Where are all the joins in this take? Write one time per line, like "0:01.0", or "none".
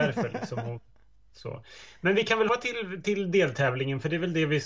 0:02.5